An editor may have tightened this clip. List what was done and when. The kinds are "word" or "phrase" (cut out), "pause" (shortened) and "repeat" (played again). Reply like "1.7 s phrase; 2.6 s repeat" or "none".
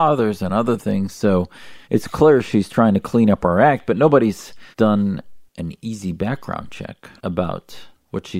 1.8 s pause; 4.7 s pause; 7.2 s pause